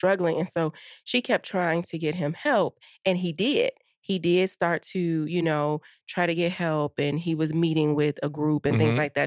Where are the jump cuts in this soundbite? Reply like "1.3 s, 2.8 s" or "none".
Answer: none